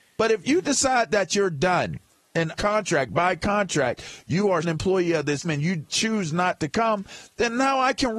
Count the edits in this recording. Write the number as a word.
three